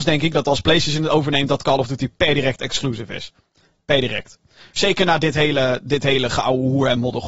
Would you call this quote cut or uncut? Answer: uncut